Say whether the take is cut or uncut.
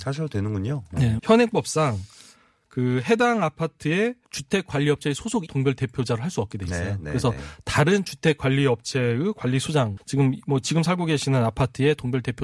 cut